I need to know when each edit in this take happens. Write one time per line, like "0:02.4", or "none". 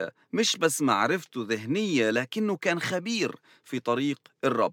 none